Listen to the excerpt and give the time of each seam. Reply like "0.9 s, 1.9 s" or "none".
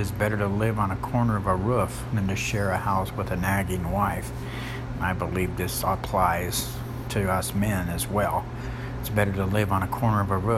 none